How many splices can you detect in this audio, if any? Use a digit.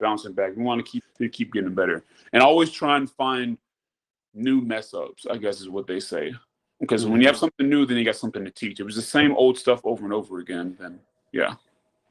1